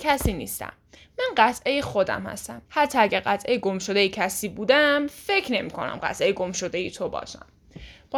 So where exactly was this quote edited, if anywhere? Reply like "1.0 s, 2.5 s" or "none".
2.7 s